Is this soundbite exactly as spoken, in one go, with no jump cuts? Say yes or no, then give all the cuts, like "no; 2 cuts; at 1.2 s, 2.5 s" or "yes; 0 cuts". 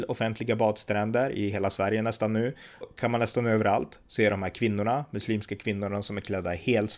no; 1 cut; at 2.8 s